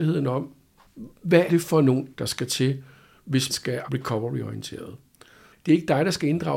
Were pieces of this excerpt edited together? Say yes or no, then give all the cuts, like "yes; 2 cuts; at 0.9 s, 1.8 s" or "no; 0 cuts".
yes; 4 cuts; at 1.5 s, 2.1 s, 3.5 s, 3.9 s